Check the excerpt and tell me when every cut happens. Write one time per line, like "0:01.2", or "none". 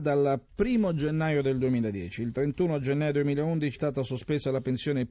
0:03.8

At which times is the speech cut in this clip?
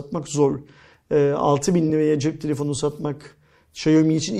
none

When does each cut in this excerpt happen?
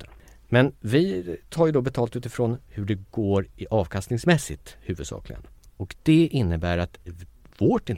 none

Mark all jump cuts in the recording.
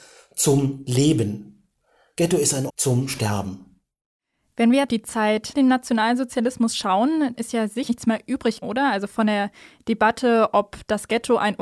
0:02.7
0:04.9
0:05.5
0:07.3
0:07.9
0:08.6

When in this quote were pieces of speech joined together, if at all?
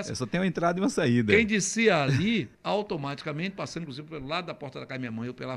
0:02.5

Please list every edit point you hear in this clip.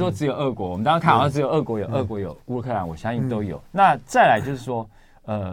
0:03.7

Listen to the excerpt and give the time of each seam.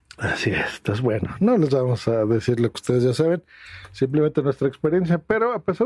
none

